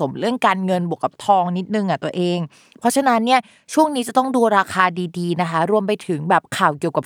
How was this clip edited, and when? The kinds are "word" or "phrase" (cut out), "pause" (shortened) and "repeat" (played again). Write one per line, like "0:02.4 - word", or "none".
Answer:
none